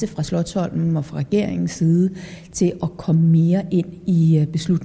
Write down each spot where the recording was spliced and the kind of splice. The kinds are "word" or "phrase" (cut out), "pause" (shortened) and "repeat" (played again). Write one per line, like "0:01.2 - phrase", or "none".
none